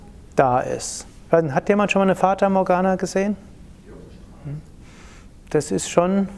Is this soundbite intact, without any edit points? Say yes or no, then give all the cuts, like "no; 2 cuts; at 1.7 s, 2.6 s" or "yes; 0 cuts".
yes; 0 cuts